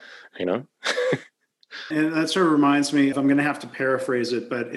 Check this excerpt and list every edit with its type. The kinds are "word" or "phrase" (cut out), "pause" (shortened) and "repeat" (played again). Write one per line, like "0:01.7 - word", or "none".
0:01.9 - word
0:03.1 - word